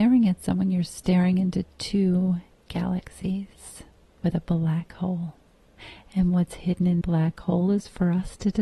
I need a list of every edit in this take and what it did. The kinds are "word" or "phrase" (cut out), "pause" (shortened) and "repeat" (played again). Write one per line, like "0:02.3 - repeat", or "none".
0:07.0 - word